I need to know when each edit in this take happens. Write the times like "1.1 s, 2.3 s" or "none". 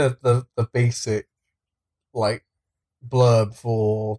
none